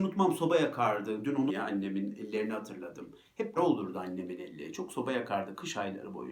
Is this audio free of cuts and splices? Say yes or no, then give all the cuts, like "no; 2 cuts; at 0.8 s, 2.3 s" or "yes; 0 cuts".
no; 2 cuts; at 1.5 s, 3.6 s